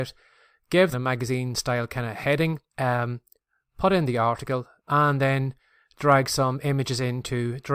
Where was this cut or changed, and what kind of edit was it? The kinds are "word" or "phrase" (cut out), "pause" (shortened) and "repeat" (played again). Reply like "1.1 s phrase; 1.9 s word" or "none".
0.9 s phrase; 2.7 s pause